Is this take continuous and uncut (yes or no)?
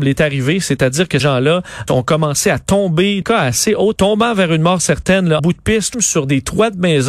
no